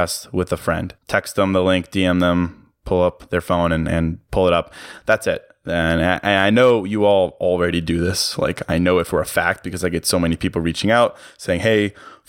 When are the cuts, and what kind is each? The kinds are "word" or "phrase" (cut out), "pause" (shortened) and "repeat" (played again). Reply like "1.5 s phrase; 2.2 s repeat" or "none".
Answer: 1.0 s pause